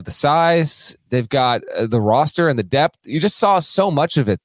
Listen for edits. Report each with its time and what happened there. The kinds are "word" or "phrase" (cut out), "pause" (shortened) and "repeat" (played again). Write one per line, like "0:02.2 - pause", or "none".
none